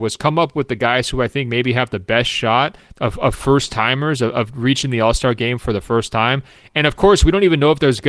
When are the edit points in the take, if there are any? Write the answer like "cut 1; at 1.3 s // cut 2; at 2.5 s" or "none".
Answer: none